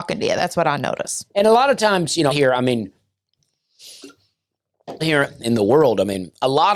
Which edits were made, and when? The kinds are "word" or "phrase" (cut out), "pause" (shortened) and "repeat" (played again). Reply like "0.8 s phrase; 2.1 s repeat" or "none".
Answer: 2.3 s word; 5.0 s word